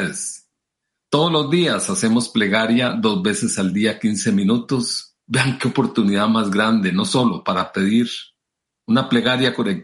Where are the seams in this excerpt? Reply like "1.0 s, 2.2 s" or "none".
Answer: 5.2 s